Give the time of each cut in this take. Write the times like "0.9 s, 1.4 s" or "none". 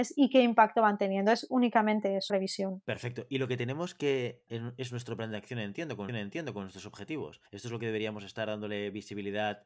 2.3 s, 4.5 s, 6.1 s, 7.5 s

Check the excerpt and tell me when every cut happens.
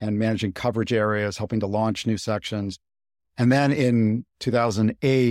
none

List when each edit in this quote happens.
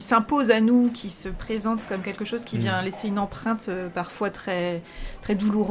none

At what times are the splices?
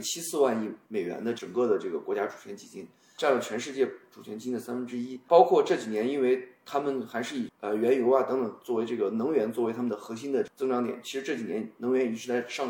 none

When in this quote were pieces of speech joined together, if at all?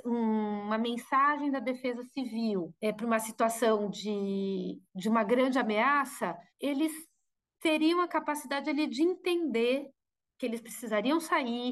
2.8 s, 4.9 s, 6.5 s

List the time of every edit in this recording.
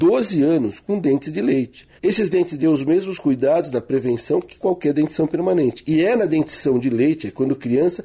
2.0 s, 2.6 s

